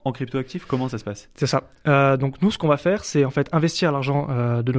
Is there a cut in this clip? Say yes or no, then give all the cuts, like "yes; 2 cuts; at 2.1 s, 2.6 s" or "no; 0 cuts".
no; 0 cuts